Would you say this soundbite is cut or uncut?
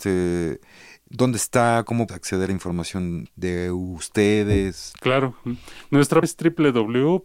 cut